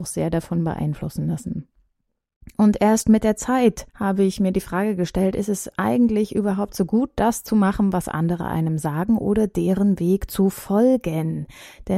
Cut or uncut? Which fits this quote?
cut